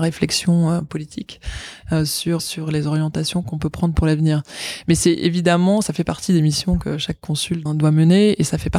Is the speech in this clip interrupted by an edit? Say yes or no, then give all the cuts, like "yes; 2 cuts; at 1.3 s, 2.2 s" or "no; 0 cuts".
yes; 3 cuts; at 2.4 s, 3.4 s, 7.7 s